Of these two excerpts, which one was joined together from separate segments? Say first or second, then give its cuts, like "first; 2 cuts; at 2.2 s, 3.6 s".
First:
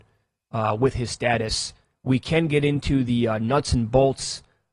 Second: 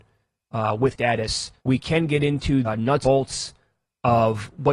second; 4 cuts; at 0.9 s, 1.6 s, 2.6 s, 3.0 s